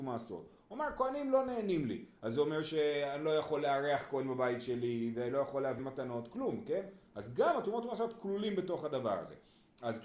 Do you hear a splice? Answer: yes; 1 cut; at 5.8 s

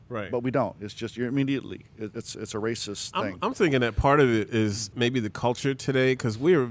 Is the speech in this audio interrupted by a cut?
yes; 2 cuts; at 2.1 s, 4.9 s

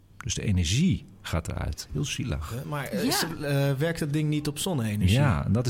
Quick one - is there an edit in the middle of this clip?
no; 0 cuts

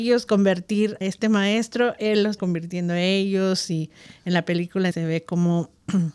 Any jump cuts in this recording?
yes; 3 cuts; at 1.0 s, 2.4 s, 4.9 s

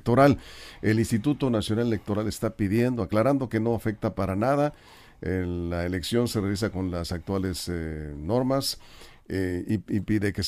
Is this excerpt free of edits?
yes; 0 cuts

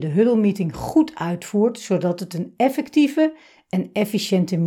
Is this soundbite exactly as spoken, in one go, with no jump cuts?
yes; 0 cuts

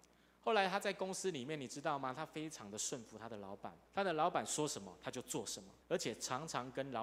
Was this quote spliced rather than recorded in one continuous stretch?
yes; 2 cuts; at 3.9 s, 5.8 s

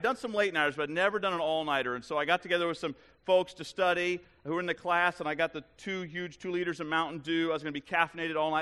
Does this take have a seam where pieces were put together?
no; 0 cuts

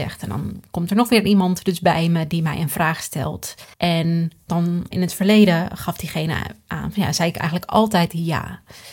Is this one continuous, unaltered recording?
no; 2 cuts; at 3.7 s, 4.9 s

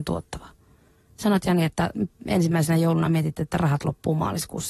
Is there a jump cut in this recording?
no; 0 cuts

